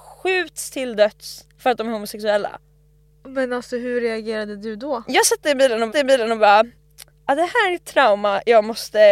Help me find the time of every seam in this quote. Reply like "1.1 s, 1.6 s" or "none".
5.9 s, 7.1 s